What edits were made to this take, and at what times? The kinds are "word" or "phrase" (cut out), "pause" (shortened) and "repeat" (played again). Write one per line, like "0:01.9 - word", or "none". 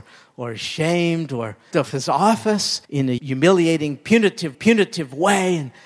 0:01.7 - word
0:02.8 - pause
0:03.2 - word
0:04.5 - repeat